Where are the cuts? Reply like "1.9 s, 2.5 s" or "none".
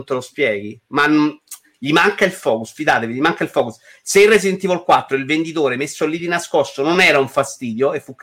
none